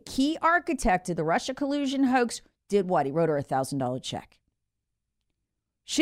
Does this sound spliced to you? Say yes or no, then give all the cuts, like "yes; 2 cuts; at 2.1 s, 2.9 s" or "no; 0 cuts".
no; 0 cuts